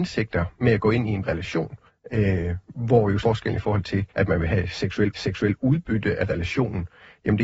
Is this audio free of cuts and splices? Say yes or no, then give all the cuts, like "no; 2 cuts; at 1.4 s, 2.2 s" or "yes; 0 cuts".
no; 5 cuts; at 1.2 s, 1.9 s, 3.2 s, 4.1 s, 5.1 s